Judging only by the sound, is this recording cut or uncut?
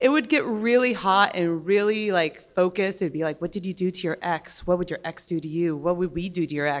uncut